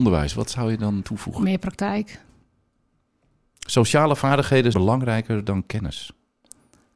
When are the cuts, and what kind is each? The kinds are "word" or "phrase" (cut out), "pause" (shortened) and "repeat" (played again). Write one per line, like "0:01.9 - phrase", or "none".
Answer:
0:01.0 - word
0:04.7 - word